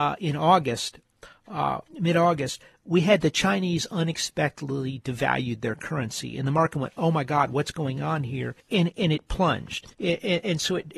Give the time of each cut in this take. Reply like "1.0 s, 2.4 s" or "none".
1.9 s, 8.6 s, 9.9 s